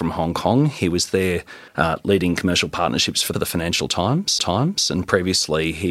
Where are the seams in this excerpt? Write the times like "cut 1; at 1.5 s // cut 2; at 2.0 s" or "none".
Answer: cut 1; at 1.7 s // cut 2; at 3.3 s // cut 3; at 4.4 s